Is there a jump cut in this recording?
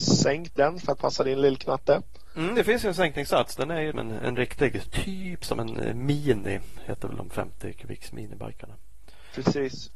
yes; 2 cuts; at 3.9 s, 4.9 s

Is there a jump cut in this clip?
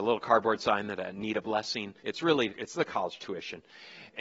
yes; 2 cuts; at 2.0 s, 2.5 s

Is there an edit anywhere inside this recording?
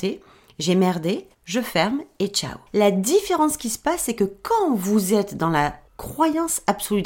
yes; 3 cuts; at 1.3 s, 2.7 s, 5.9 s

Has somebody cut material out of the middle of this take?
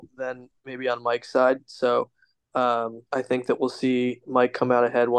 yes; 1 cut; at 3.1 s

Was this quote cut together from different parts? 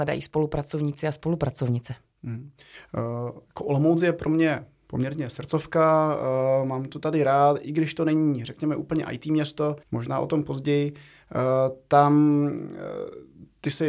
yes; 1 cut; at 9.8 s

